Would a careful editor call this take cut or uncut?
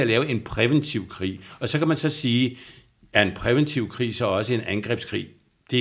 uncut